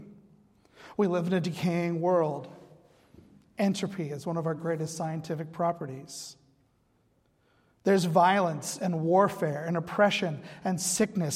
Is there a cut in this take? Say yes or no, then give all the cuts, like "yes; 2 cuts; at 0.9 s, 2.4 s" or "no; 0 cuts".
no; 0 cuts